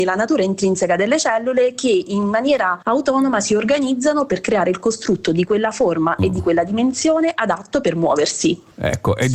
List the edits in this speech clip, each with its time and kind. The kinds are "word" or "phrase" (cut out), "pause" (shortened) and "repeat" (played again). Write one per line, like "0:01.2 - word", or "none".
0:02.8 - pause